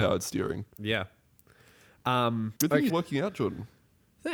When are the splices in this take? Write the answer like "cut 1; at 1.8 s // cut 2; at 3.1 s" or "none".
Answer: cut 1; at 2.6 s // cut 2; at 2.9 s